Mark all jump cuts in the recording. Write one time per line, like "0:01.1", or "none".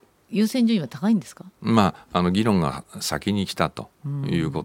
0:01.5